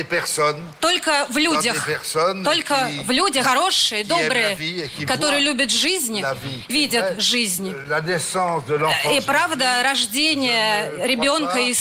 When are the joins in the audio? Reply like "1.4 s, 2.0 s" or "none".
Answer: 3.4 s, 6.7 s